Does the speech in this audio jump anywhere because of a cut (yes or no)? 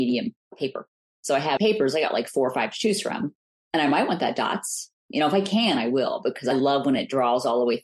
yes